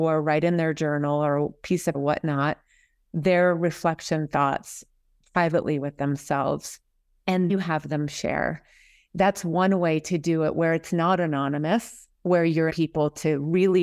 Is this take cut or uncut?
cut